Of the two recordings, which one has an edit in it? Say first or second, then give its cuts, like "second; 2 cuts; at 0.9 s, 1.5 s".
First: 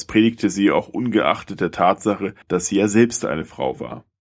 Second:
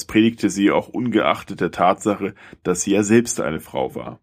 first; 1 cut; at 2.4 s